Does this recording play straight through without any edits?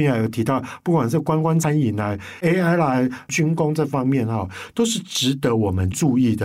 yes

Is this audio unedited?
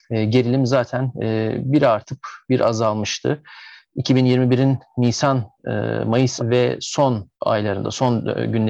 no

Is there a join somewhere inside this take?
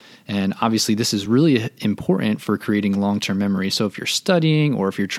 no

